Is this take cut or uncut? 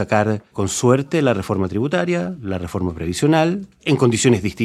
uncut